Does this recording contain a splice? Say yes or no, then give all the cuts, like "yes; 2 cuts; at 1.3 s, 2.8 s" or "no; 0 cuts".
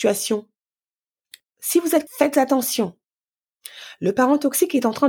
yes; 1 cut; at 2.1 s